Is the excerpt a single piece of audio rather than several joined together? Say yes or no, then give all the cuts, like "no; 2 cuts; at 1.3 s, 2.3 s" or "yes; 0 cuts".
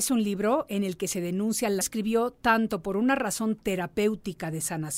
no; 1 cut; at 1.8 s